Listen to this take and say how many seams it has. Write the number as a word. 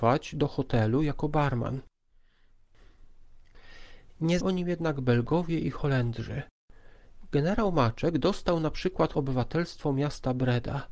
two